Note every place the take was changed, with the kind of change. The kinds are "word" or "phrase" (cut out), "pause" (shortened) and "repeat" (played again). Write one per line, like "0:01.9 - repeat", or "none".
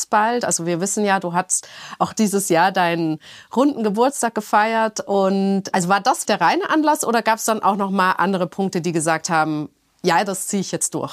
0:06.2 - word